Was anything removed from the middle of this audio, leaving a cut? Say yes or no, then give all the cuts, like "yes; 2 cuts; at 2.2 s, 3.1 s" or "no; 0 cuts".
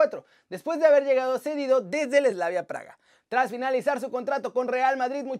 no; 0 cuts